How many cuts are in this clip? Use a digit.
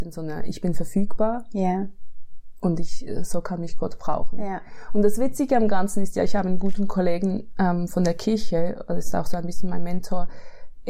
0